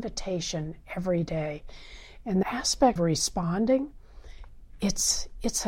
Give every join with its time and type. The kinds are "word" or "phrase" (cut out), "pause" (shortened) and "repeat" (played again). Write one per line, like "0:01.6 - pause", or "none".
0:02.4 - word
0:03.0 - word